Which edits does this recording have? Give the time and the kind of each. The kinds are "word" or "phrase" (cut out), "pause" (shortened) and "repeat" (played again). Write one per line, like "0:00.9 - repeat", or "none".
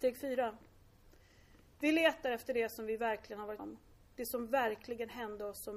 0:03.6 - word